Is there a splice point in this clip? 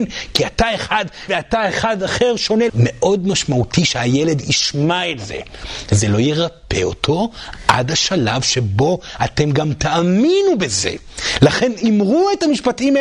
yes; 2 cuts; at 1.3 s, 2.7 s

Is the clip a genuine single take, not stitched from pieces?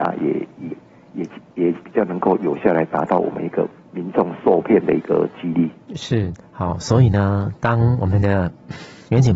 no; 1 cut; at 3.8 s

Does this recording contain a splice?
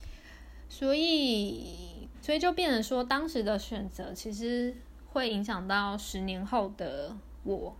yes; 1 cut; at 2.2 s

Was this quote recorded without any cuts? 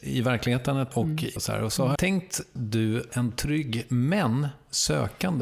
no; 5 cuts; at 0.9 s, 1.4 s, 2.0 s, 2.6 s, 3.1 s

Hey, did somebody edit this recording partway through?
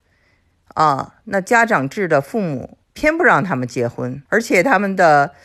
yes; 2 cuts; at 2.8 s, 4.3 s

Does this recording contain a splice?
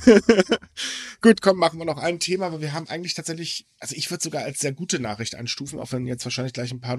no; 0 cuts

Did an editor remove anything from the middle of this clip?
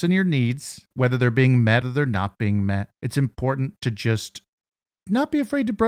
yes; 3 cuts; at 0.9 s, 1.8 s, 3.0 s

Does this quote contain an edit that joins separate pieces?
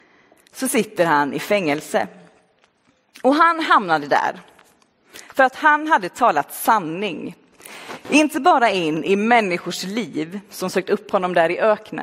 no; 0 cuts

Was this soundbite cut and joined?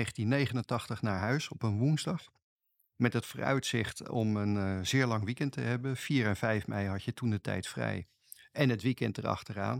no; 0 cuts

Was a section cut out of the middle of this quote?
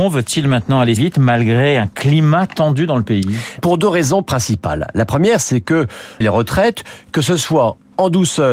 yes; 3 cuts; at 1.0 s, 3.6 s, 6.2 s

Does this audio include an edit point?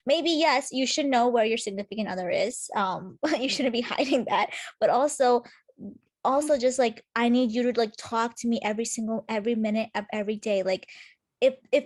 no; 0 cuts

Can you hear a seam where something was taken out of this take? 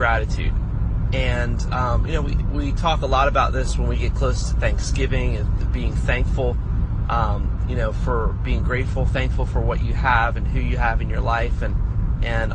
no; 0 cuts

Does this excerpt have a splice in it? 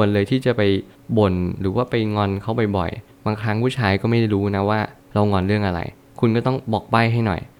no; 0 cuts

